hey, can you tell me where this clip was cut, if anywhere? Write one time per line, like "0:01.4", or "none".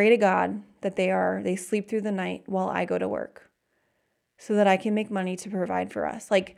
none